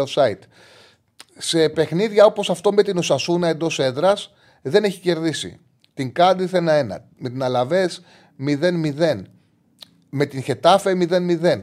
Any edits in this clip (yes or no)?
no